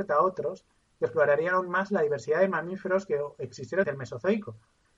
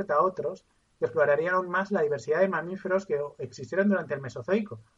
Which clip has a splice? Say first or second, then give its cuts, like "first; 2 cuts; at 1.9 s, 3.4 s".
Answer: first; 1 cut; at 3.8 s